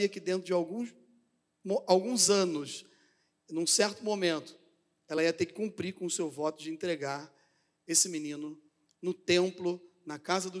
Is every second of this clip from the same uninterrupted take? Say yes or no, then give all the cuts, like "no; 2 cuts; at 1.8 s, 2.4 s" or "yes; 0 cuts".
yes; 0 cuts